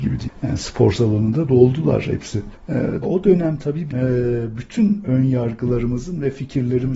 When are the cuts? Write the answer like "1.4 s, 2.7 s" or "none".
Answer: 3.0 s, 3.9 s